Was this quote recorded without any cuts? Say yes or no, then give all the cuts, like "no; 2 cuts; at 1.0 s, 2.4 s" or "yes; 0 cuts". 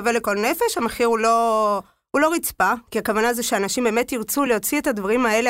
yes; 0 cuts